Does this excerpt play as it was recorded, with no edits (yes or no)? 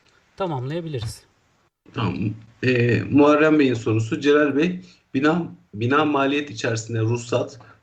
yes